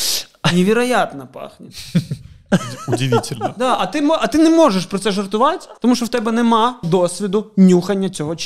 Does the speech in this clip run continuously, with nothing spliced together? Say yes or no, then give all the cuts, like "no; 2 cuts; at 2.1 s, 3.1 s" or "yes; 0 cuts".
no; 2 cuts; at 5.8 s, 6.8 s